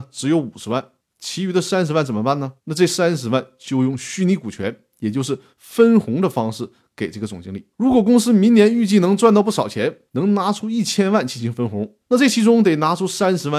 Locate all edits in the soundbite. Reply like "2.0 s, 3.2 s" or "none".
1.0 s, 2.6 s, 7.7 s, 10.1 s, 12.0 s